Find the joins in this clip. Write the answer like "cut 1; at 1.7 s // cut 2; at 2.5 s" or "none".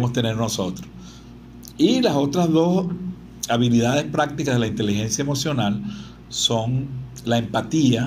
none

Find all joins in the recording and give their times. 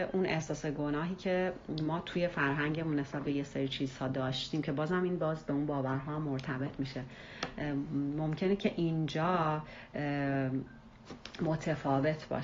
none

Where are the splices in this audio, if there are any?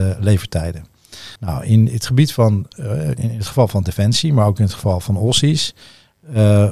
cut 1; at 1.4 s

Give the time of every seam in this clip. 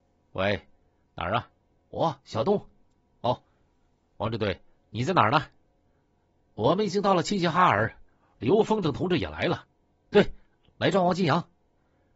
cut 1; at 1.6 s

